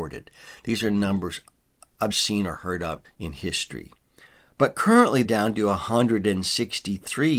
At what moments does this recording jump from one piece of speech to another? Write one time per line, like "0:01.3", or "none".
0:02.1
0:03.0
0:05.2